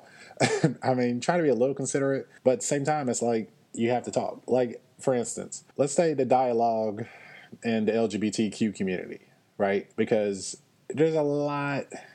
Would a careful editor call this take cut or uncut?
cut